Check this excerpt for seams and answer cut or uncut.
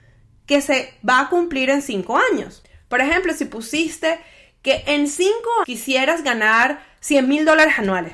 cut